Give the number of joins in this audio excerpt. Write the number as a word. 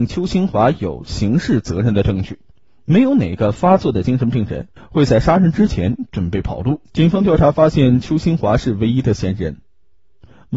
three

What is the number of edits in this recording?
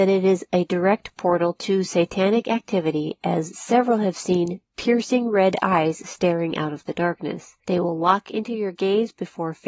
one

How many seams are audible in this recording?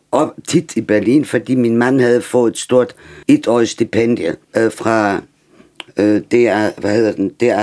two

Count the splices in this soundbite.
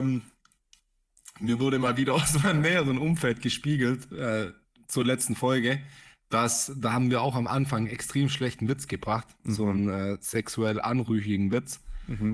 zero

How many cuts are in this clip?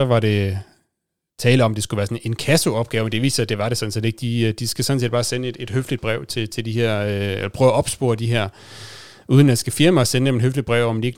zero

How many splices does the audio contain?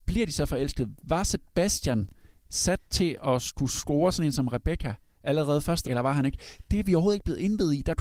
one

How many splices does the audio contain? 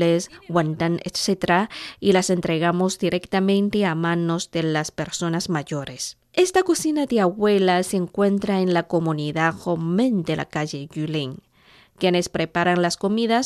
one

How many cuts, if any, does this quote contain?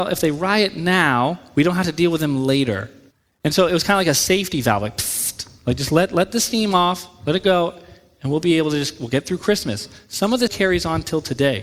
two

